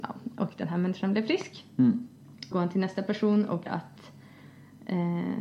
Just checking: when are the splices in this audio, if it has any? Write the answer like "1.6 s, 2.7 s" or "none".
2.5 s, 3.7 s